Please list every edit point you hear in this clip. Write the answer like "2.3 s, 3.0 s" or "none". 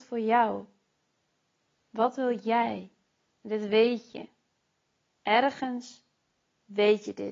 none